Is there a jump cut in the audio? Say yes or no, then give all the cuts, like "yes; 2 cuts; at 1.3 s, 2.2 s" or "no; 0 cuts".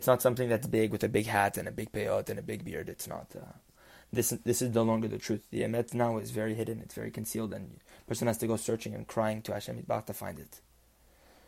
no; 0 cuts